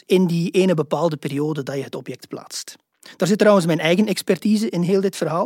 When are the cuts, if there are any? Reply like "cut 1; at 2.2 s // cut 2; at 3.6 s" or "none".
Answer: none